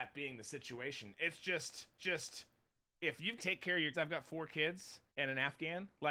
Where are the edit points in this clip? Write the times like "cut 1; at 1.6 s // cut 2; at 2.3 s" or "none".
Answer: cut 1; at 2.0 s // cut 2; at 3.4 s // cut 3; at 3.9 s // cut 4; at 5.1 s